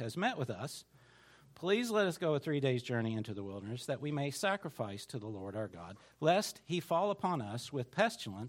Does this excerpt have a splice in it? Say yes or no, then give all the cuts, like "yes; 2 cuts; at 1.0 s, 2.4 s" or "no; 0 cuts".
no; 0 cuts